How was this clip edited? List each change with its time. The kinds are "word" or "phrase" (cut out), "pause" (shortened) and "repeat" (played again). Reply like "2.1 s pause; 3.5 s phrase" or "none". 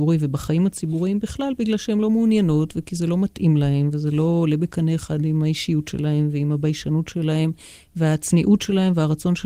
none